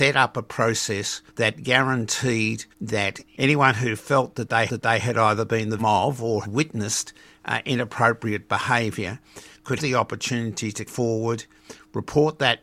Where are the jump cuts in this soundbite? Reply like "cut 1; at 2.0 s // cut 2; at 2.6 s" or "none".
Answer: cut 1; at 1.3 s // cut 2; at 2.7 s // cut 3; at 4.7 s // cut 4; at 5.8 s // cut 5; at 6.4 s // cut 6; at 9.8 s // cut 7; at 10.9 s